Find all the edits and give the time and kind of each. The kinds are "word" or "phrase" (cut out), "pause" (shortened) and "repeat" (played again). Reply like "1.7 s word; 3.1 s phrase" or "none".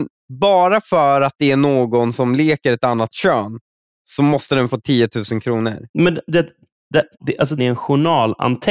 5.9 s pause; 7.1 s pause; 7.6 s phrase